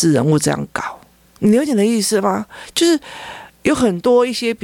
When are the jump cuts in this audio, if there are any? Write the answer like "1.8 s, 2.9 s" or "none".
none